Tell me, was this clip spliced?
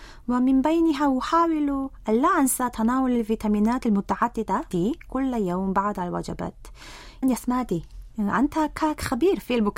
yes; 2 cuts; at 4.7 s, 7.2 s

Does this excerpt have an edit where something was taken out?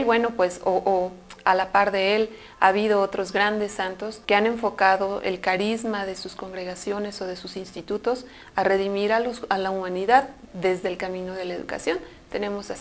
yes; 1 cut; at 4.2 s

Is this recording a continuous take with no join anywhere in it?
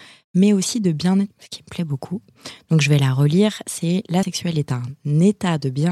no; 2 cuts; at 1.3 s, 4.2 s

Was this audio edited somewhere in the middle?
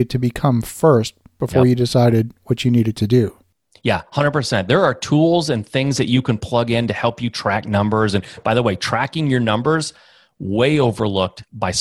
no; 0 cuts

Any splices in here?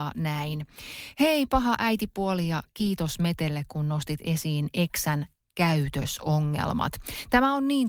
no; 0 cuts

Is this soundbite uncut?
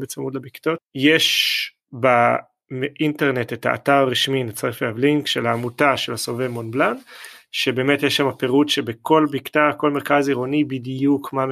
yes; 0 cuts

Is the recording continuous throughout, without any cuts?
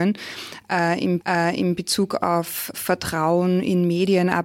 no; 2 cuts; at 1.2 s, 2.7 s

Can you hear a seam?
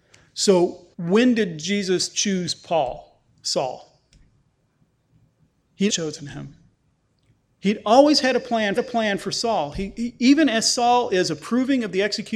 yes; 4 cuts; at 0.9 s, 3.3 s, 5.9 s, 8.8 s

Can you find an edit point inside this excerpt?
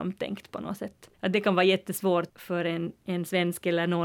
yes; 2 cuts; at 1.1 s, 2.3 s

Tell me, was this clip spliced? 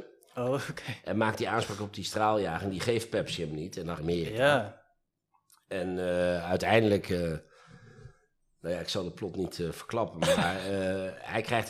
yes; 1 cut; at 4.0 s

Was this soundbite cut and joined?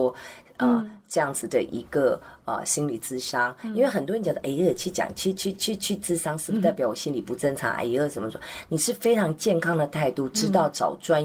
no; 0 cuts

